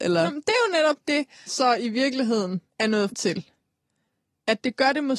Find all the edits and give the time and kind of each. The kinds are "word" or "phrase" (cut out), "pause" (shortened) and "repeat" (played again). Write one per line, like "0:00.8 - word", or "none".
0:01.5 - word
0:02.7 - pause
0:03.1 - word